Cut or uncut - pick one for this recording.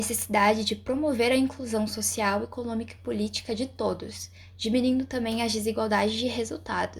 uncut